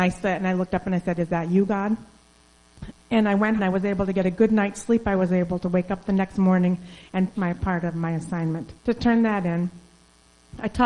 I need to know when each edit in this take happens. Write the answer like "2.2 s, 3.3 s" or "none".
3.6 s, 7.4 s, 8.8 s